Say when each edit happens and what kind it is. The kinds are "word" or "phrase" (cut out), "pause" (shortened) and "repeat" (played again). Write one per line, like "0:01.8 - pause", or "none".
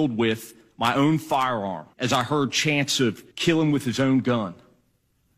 0:01.9 - pause
0:03.3 - pause